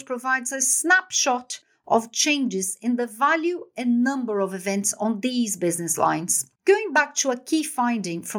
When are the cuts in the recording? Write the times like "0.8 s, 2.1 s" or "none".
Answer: 6.6 s